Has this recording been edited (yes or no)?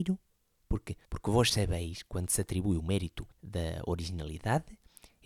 yes